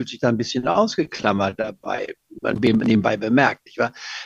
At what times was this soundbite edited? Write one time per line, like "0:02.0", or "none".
0:02.6

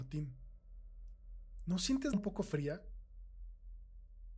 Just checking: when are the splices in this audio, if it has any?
0:02.1

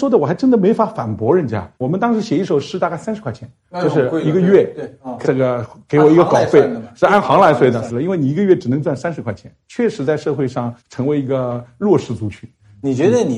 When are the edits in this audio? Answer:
0:01.7
0:03.6
0:05.2
0:10.8

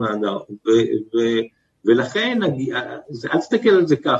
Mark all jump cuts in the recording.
none

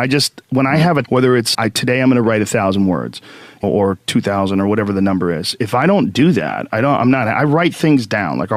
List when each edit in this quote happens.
0:01.0
0:01.5
0:03.6

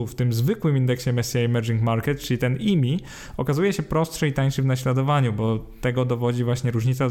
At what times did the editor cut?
none

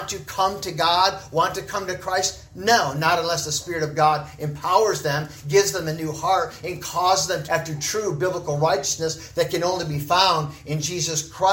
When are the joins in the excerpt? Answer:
0:07.5

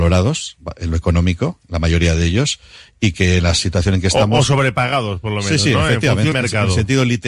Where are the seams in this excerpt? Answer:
0:06.3

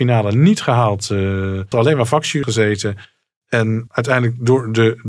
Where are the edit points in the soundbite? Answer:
0:01.7
0:02.4
0:03.9

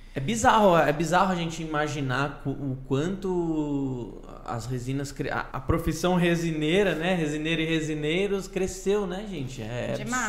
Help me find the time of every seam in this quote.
0:05.5

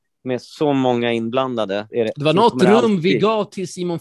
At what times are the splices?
0:01.9

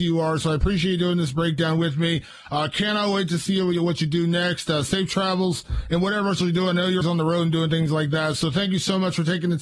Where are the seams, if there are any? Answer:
0:07.0

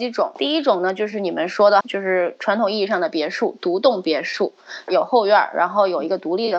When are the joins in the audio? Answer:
0:01.8
0:04.9

